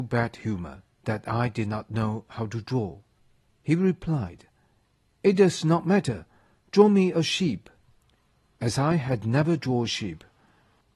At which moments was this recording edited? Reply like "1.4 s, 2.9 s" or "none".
0.9 s